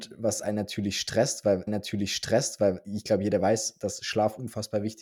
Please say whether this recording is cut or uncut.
cut